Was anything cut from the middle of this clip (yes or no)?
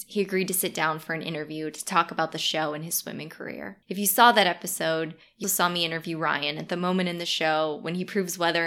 yes